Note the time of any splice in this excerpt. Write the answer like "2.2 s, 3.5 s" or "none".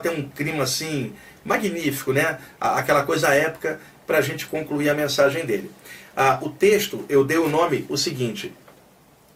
none